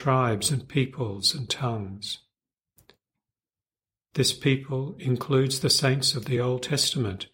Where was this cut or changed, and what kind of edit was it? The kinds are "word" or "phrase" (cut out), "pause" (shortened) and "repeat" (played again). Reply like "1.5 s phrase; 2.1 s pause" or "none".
none